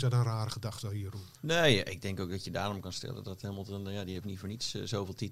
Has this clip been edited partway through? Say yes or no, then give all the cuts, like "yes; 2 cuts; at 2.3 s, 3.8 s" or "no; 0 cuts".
yes; 1 cut; at 1.3 s